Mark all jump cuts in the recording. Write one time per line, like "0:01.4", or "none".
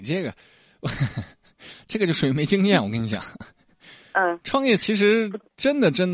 none